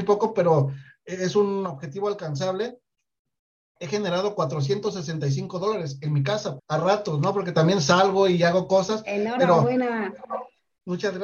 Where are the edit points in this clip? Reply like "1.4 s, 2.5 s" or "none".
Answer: 6.6 s